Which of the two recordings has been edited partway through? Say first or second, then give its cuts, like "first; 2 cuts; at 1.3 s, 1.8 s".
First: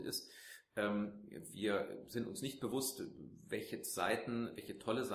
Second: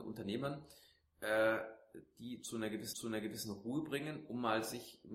second; 1 cut; at 2.9 s